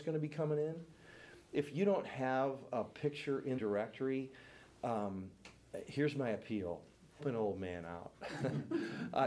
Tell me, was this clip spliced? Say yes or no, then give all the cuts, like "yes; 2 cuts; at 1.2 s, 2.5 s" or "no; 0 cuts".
yes; 2 cuts; at 3.6 s, 7.2 s